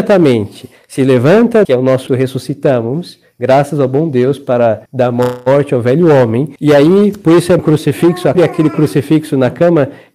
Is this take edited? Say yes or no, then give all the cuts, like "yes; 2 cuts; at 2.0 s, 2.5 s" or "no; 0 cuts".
yes; 6 cuts; at 1.6 s, 2.1 s, 4.9 s, 6.6 s, 7.6 s, 8.3 s